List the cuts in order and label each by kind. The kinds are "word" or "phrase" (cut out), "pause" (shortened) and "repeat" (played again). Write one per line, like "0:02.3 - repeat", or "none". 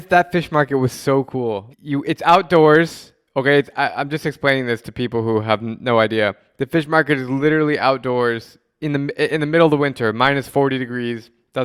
0:01.7 - word